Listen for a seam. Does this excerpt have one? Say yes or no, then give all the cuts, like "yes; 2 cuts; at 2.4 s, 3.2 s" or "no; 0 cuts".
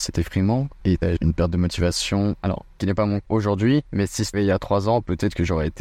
yes; 4 cuts; at 1.2 s, 2.8 s, 3.2 s, 4.3 s